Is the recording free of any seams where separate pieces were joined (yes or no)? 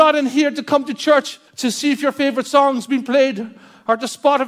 no